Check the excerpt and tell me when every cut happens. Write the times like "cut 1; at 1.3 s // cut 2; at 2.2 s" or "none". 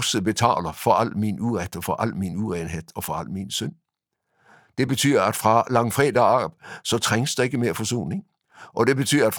none